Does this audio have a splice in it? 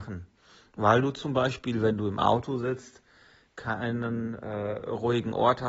no; 0 cuts

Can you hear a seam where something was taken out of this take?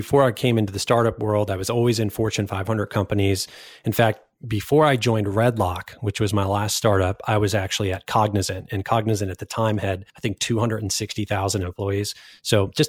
yes; 1 cut; at 10.1 s

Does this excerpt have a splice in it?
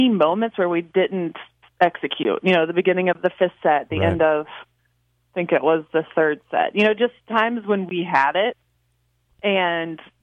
no; 0 cuts

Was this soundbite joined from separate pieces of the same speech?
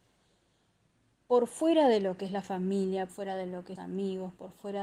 yes; 2 cuts; at 3.1 s, 3.8 s

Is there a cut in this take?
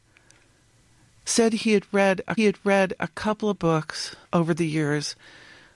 yes; 3 cuts; at 2.4 s, 3.6 s, 4.2 s

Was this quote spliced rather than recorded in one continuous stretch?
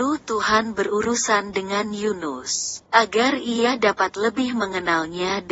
yes; 1 cut; at 2.9 s

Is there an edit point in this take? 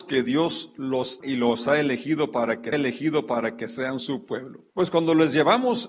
yes; 3 cuts; at 1.2 s, 2.7 s, 4.7 s

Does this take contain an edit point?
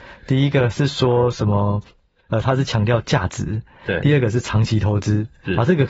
no; 0 cuts

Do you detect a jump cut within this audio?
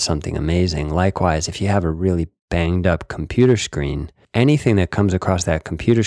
no; 0 cuts

